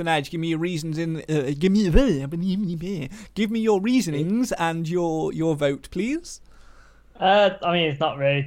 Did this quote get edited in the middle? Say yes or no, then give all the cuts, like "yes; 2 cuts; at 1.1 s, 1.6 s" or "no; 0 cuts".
no; 0 cuts